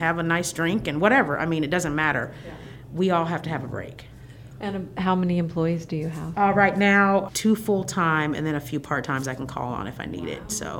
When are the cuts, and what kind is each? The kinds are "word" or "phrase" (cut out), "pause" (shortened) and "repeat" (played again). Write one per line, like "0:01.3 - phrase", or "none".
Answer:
none